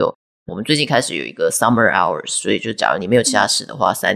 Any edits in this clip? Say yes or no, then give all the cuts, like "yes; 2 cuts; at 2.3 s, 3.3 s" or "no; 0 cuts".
no; 0 cuts